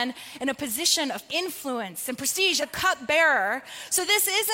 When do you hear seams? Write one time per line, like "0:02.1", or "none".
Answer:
0:01.3
0:02.6